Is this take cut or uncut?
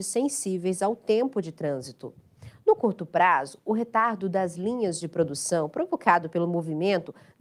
uncut